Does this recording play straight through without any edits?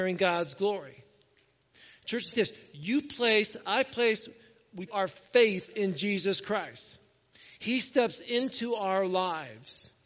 no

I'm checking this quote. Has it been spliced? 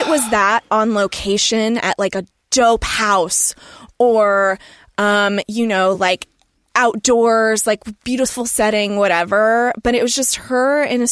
no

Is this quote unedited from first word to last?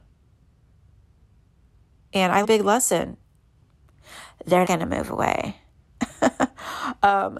no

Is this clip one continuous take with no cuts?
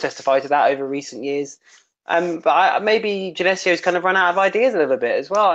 yes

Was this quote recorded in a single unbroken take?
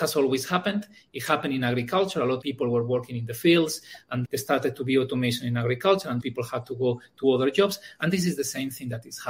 no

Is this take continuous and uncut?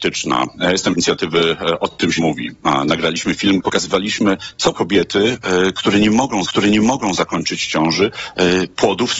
no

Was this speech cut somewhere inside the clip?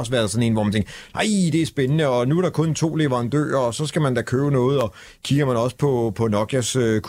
no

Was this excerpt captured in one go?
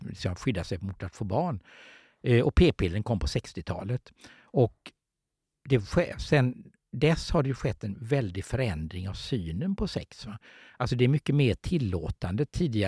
yes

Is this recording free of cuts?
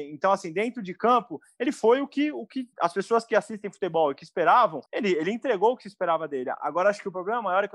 no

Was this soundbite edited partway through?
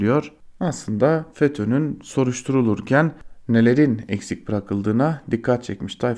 no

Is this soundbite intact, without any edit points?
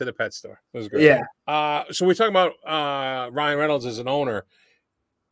no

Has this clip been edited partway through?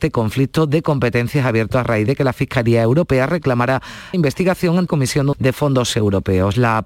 yes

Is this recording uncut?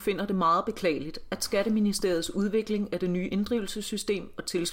yes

